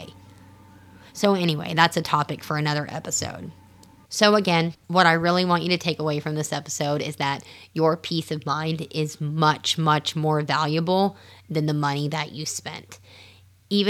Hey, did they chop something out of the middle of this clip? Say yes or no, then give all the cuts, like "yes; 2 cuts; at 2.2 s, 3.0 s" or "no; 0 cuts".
no; 0 cuts